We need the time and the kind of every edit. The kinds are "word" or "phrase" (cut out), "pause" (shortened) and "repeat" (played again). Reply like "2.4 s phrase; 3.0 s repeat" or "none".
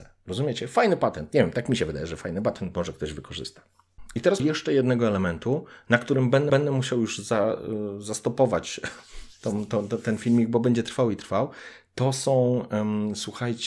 4.4 s phrase; 6.5 s repeat